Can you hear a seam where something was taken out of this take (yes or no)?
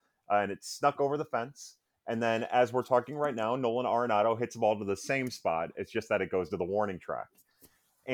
no